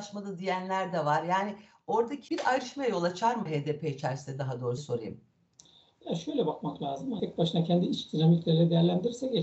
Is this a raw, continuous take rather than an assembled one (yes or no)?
no